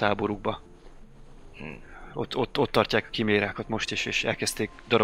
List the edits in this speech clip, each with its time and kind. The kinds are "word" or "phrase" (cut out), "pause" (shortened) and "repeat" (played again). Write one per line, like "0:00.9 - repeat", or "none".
none